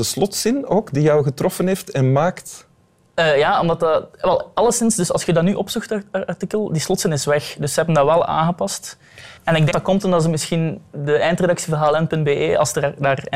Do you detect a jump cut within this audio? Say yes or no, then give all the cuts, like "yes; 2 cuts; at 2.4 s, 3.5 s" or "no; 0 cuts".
yes; 2 cuts; at 9.4 s, 9.7 s